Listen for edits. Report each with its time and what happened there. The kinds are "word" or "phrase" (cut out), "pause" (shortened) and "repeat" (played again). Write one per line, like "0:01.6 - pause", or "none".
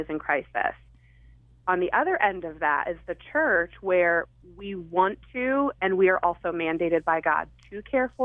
none